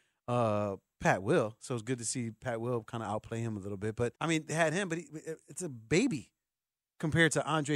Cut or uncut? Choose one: cut